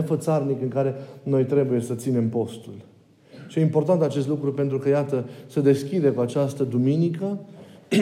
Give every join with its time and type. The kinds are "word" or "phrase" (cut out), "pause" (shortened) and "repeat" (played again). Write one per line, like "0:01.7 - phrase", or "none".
none